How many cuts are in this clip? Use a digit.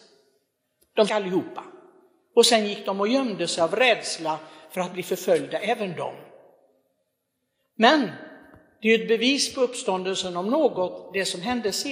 1